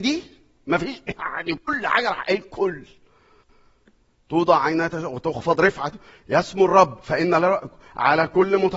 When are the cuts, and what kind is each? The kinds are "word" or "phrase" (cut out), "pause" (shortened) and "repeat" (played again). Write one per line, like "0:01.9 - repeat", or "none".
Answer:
none